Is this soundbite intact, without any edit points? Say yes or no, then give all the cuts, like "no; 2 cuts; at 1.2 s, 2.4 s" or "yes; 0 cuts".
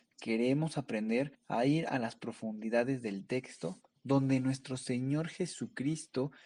no; 1 cut; at 1.3 s